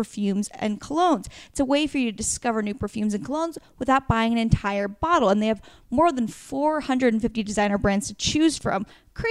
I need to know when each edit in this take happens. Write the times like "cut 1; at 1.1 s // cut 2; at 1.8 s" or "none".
none